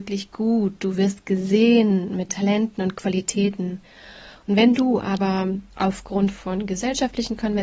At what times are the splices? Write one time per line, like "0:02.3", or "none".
0:02.3
0:05.7